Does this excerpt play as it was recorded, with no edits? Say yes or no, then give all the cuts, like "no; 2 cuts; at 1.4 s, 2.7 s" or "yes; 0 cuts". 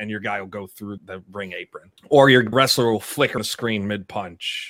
no; 4 cuts; at 1.0 s, 2.0 s, 2.5 s, 3.4 s